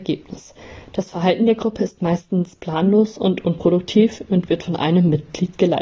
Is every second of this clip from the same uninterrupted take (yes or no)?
yes